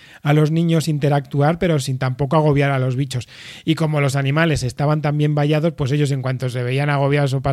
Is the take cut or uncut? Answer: uncut